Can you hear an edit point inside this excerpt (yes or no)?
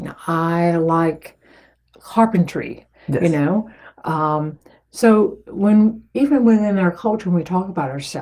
no